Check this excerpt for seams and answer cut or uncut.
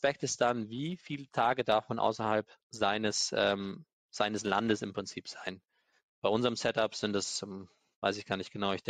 uncut